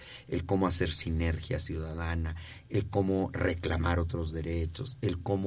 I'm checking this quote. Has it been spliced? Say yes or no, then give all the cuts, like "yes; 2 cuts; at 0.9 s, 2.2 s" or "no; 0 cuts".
no; 0 cuts